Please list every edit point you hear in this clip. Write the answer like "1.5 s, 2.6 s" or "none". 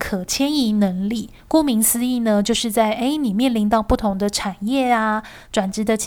1.4 s